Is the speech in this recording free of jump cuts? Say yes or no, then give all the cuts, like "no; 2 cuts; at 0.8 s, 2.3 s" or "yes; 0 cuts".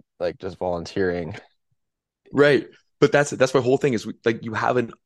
yes; 0 cuts